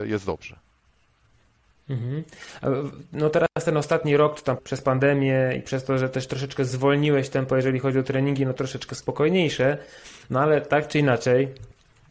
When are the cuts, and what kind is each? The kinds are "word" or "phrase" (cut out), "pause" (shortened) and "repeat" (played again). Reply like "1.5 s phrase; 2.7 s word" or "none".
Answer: 4.6 s phrase; 8.6 s word